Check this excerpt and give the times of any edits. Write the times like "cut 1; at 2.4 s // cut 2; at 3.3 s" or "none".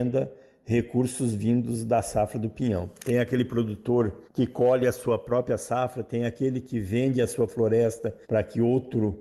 cut 1; at 4.3 s // cut 2; at 8.2 s